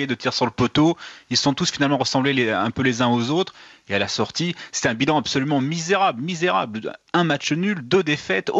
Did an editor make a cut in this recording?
no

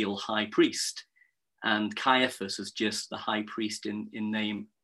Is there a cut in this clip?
no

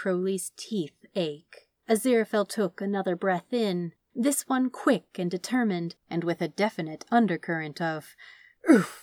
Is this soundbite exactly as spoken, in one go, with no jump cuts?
no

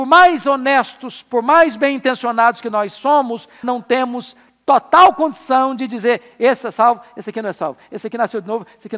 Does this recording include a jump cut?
yes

